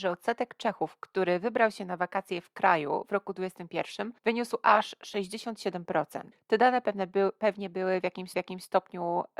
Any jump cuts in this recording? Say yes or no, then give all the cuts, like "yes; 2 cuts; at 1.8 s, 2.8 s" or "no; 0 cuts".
yes; 3 cuts; at 4.2 s, 6.3 s, 8.3 s